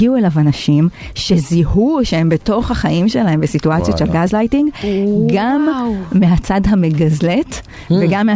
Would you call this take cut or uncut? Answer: uncut